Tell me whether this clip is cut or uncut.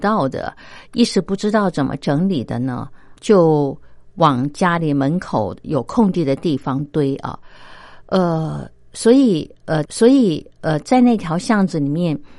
cut